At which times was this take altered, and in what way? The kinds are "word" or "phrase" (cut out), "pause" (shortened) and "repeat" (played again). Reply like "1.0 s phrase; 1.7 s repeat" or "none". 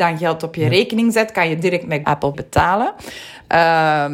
2.0 s phrase; 2.3 s word